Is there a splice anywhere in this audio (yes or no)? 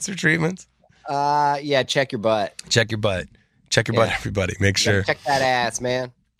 no